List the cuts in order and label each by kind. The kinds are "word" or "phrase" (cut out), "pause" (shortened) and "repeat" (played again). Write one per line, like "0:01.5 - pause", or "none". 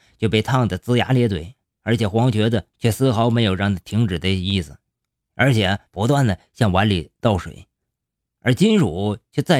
0:02.7 - pause
0:05.9 - pause
0:07.2 - pause

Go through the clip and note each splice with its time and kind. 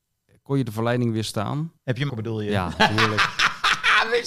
0:01.8 - pause
0:02.1 - word

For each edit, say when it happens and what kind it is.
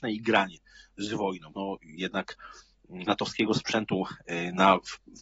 0:01.5 - word
0:03.1 - word

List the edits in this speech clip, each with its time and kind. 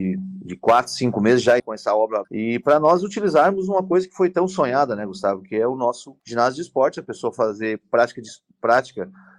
0:01.6 - word
0:02.2 - word
0:06.2 - pause

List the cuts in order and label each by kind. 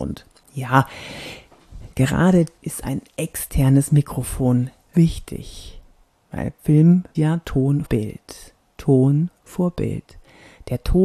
0:01.9 - word
0:02.6 - word
0:04.9 - word
0:06.6 - word
0:07.1 - word
0:07.8 - word

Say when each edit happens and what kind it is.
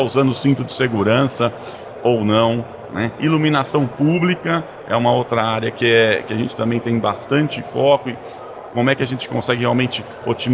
none

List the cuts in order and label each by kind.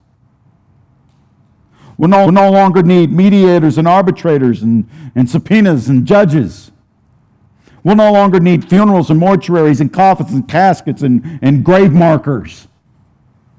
0:02.3 - repeat
0:07.5 - pause

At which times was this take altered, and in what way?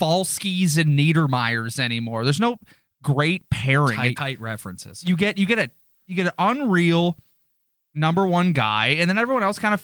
0:04.2 - word

